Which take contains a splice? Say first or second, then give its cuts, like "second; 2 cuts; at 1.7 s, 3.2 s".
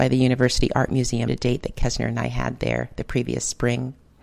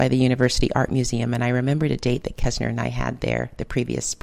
first; 1 cut; at 1.3 s